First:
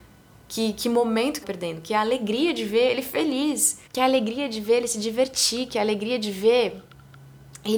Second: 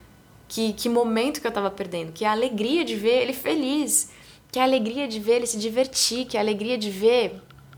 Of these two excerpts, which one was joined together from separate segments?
first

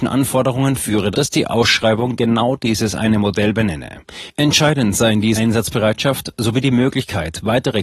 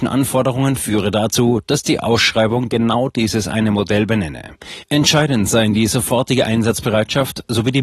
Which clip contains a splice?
first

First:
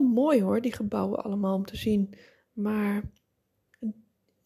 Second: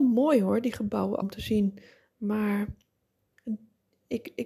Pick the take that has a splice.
second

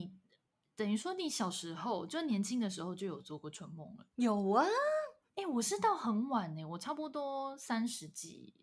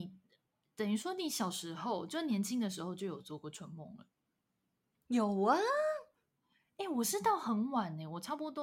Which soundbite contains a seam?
first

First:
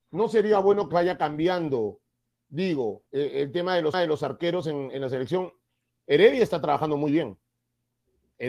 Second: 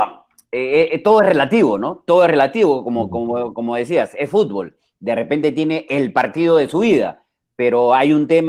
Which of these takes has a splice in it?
first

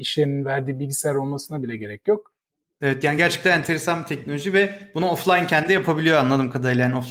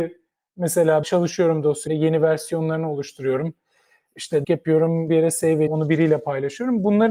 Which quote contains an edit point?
second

